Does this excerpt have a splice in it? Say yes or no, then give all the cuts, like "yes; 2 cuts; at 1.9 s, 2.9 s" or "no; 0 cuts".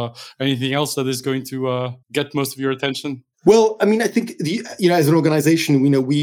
yes; 2 cuts; at 2.0 s, 3.3 s